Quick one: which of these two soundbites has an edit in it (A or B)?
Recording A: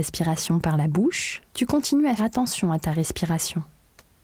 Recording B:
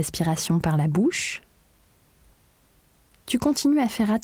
A